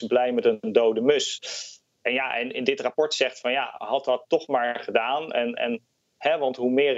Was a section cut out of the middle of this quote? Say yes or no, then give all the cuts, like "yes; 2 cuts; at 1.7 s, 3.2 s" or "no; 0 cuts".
no; 0 cuts